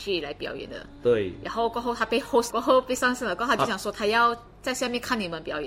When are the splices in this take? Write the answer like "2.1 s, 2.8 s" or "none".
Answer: 2.5 s

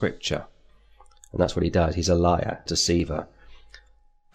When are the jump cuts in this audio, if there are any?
2.7 s

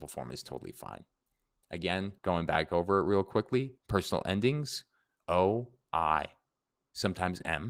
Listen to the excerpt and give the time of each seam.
2.2 s, 3.8 s

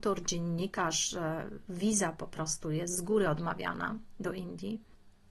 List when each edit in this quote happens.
none

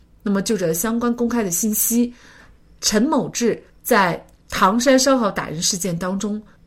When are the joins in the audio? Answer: none

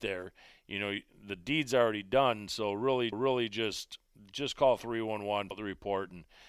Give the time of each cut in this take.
3.1 s, 5.5 s

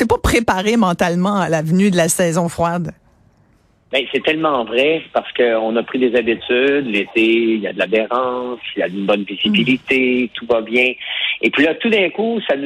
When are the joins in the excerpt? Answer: none

